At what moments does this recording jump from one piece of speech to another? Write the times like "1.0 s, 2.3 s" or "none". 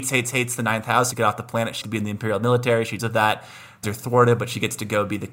1.1 s, 1.8 s, 3.0 s, 3.8 s